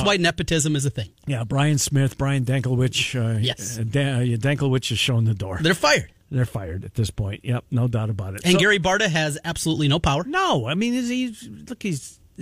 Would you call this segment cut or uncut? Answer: uncut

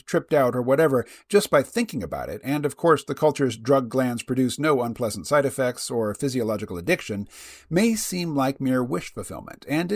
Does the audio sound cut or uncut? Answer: uncut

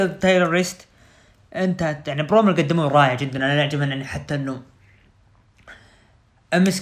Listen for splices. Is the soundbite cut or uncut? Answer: uncut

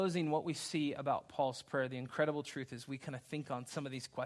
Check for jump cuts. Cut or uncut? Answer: uncut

